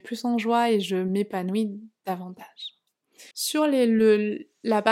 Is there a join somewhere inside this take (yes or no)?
yes